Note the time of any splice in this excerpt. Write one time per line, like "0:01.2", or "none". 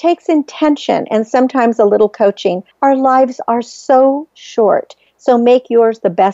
0:02.7